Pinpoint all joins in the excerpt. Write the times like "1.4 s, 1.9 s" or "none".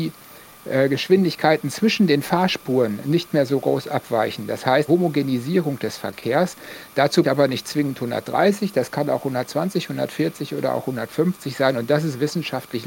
4.9 s, 7.2 s